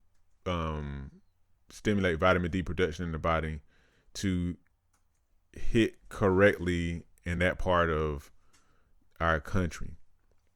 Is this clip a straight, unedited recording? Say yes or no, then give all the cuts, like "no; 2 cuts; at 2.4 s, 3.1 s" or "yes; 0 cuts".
yes; 0 cuts